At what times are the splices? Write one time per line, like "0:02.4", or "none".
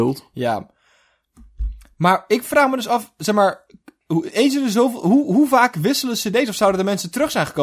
none